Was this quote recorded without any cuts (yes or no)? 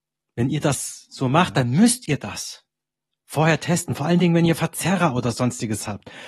yes